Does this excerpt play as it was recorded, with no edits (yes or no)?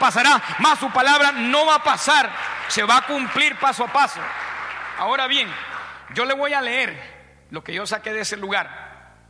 yes